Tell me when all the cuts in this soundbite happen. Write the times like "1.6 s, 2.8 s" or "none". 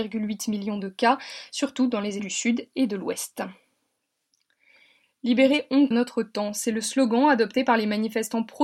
2.2 s, 5.9 s